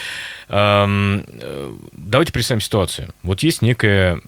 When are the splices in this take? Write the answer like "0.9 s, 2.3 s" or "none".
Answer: none

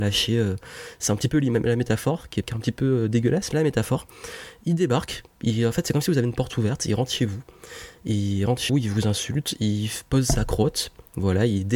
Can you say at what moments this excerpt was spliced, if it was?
2.4 s, 3.5 s, 8.7 s

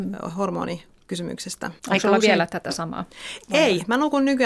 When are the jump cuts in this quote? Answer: 1.8 s

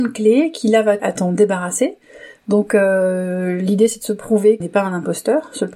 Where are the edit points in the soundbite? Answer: 1.0 s, 4.6 s

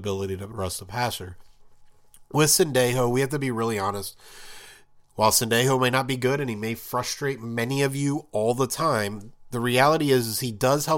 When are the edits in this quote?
none

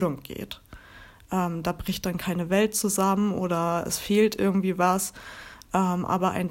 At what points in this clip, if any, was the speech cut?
none

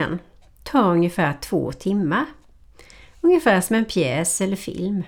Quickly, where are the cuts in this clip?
none

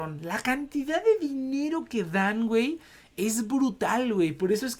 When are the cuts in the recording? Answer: none

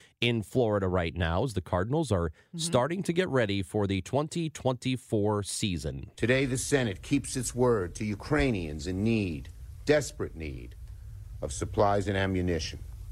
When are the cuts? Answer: none

